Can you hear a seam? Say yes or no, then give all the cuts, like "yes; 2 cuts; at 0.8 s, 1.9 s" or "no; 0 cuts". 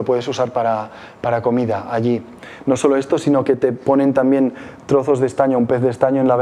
no; 0 cuts